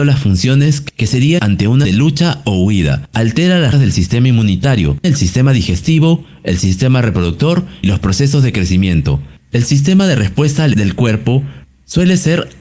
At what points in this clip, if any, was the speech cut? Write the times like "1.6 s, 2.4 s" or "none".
1.4 s, 1.8 s, 3.7 s, 5.0 s, 7.8 s, 10.7 s